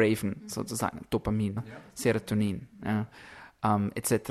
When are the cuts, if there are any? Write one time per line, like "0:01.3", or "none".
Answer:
0:01.6